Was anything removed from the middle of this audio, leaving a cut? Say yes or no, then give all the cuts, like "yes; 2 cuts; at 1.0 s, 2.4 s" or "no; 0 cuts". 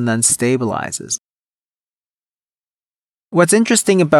no; 0 cuts